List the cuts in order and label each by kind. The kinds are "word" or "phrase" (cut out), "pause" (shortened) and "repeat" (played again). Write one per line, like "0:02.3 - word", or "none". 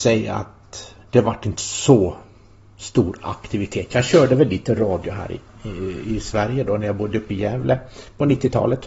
none